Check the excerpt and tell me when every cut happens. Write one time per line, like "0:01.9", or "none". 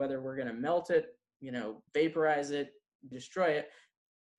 0:01.9
0:03.1